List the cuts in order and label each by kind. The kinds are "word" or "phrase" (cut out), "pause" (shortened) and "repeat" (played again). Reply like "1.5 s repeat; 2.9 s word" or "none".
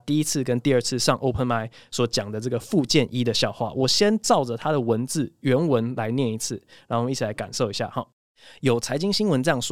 none